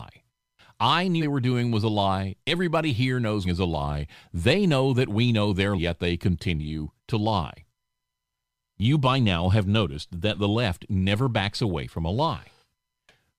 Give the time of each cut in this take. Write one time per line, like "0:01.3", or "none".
0:01.2
0:03.4
0:05.8
0:07.0